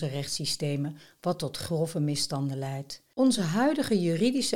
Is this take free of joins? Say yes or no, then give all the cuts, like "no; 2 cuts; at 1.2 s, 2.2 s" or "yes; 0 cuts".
yes; 0 cuts